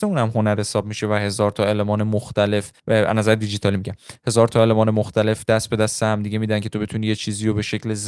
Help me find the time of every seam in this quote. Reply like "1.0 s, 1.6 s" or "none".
2.8 s

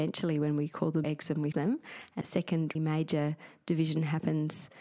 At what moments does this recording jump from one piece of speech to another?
1.0 s, 1.5 s, 2.2 s, 2.8 s

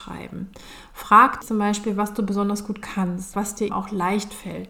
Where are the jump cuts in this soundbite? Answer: 1.4 s, 3.3 s, 3.7 s

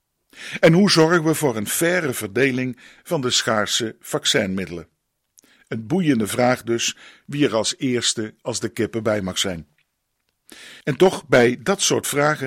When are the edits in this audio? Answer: 10.8 s

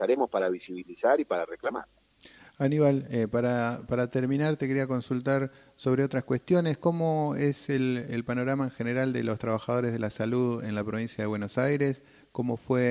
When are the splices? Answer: none

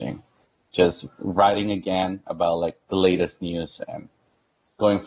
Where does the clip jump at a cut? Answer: none

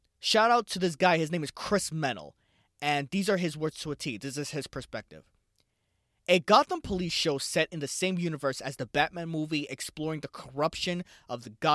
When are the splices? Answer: none

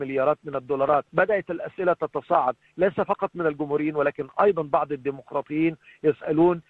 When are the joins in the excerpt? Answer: 1.1 s

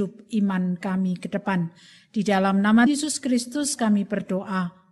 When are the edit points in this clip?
2.9 s

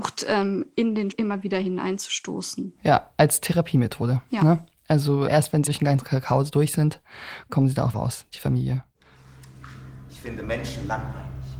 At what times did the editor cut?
1.1 s, 5.3 s, 5.7 s, 7.9 s

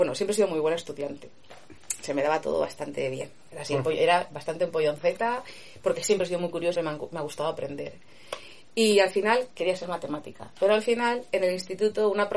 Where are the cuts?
6.8 s

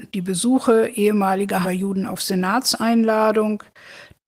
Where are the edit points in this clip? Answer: 1.6 s

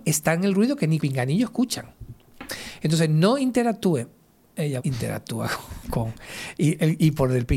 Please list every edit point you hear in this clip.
1.0 s, 4.8 s

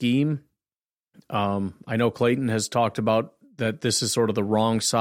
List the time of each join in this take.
none

